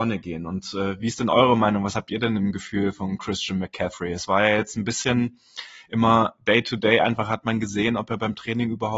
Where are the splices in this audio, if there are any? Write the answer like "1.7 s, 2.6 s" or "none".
none